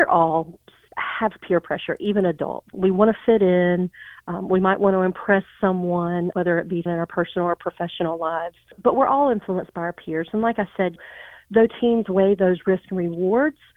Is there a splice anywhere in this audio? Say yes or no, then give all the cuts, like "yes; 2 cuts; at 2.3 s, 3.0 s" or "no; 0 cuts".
yes; 2 cuts; at 6.3 s, 6.9 s